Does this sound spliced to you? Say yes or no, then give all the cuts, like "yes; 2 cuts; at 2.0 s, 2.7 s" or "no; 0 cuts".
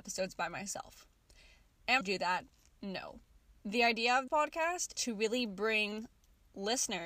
yes; 4 cuts; at 2.0 s, 3.4 s, 4.3 s, 5.0 s